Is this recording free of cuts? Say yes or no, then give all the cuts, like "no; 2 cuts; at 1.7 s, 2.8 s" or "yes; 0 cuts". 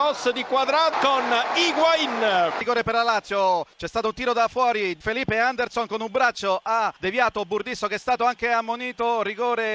no; 4 cuts; at 0.9 s, 3.7 s, 5.0 s, 7.0 s